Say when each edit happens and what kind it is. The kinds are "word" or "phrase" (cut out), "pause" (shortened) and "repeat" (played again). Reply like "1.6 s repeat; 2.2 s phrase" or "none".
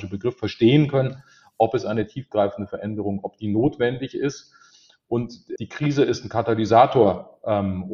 5.6 s word